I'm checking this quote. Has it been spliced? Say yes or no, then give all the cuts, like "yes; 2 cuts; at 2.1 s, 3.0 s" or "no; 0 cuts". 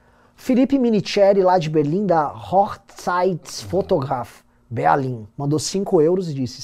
yes; 1 cut; at 5.3 s